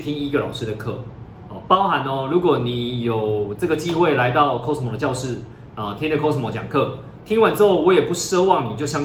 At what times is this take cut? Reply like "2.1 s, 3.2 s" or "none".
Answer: none